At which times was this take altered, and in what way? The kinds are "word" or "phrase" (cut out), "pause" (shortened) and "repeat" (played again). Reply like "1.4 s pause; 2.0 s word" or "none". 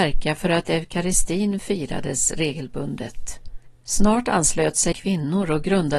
3.7 s pause; 4.9 s word